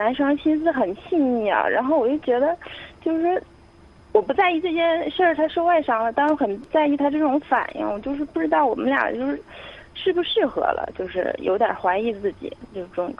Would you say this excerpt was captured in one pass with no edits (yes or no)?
yes